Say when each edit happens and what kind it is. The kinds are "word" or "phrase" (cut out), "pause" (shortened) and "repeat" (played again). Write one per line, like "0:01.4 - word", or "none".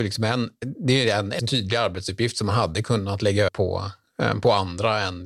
0:01.4 - word
0:03.5 - word